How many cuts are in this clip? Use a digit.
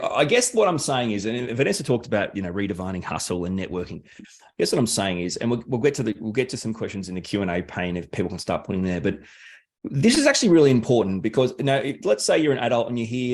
0